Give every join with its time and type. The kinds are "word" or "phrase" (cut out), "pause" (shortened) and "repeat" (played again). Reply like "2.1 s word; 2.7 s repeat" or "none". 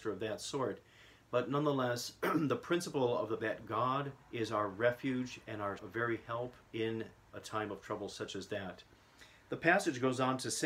3.4 s phrase; 4.2 s pause; 5.8 s word; 6.6 s pause